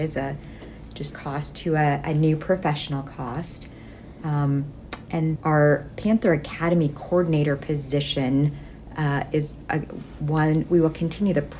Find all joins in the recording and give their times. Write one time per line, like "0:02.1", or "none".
0:01.1
0:05.4